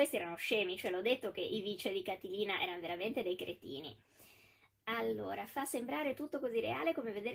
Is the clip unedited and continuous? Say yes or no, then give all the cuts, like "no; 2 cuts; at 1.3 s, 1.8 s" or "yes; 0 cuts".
yes; 0 cuts